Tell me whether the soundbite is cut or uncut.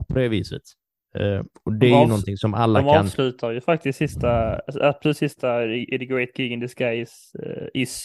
uncut